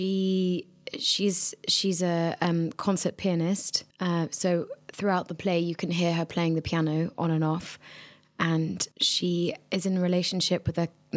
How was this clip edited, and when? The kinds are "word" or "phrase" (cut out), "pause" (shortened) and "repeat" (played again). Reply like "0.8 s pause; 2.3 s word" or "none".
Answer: 3.9 s pause; 8.9 s pause